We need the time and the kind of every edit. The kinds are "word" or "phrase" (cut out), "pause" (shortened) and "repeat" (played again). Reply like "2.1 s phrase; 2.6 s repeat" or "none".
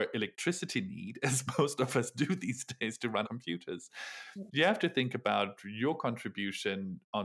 3.2 s word